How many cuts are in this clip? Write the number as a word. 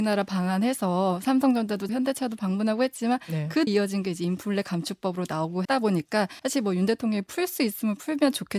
four